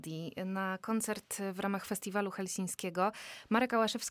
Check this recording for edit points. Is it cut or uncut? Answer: uncut